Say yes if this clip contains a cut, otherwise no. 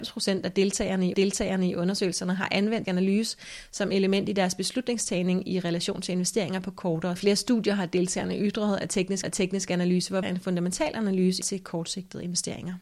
yes